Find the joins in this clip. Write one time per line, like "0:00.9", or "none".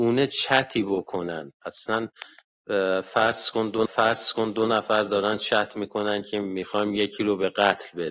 0:03.9